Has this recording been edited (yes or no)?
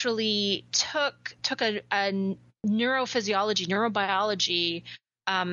yes